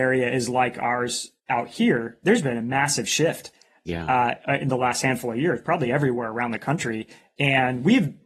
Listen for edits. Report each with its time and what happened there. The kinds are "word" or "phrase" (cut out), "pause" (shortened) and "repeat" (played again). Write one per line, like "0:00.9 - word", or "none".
none